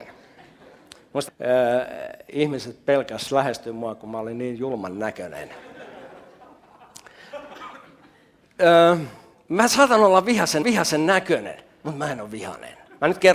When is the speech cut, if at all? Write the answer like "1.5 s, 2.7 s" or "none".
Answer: 1.3 s, 10.6 s